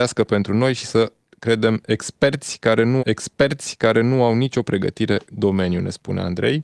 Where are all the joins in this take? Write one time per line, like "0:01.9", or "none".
0:03.0
0:05.3